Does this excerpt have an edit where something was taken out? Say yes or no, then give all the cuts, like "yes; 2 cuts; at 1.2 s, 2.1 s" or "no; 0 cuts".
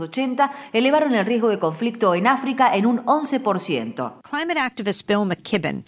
no; 0 cuts